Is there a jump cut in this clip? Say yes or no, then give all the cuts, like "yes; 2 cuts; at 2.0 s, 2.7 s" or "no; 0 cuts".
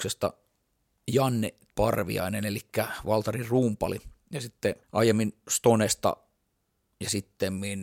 yes; 2 cuts; at 1.7 s, 4.8 s